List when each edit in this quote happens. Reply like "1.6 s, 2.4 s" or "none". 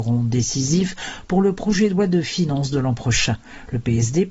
none